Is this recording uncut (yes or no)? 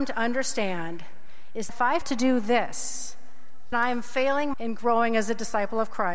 no